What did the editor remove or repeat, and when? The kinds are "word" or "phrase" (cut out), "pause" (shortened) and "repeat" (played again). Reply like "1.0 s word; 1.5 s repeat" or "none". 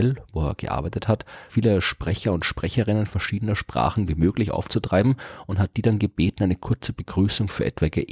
1.5 s word